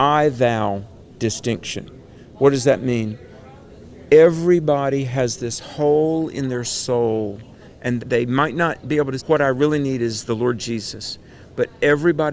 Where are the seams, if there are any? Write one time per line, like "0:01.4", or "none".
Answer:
0:08.0
0:09.2